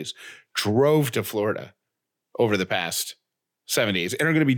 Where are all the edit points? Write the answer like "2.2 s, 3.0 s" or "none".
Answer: none